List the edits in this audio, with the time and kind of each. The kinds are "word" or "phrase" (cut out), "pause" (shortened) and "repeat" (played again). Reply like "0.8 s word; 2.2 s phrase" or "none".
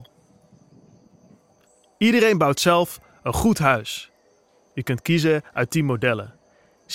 none